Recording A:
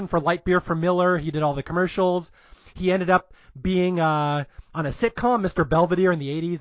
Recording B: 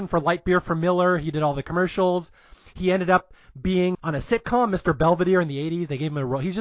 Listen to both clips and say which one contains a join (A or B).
B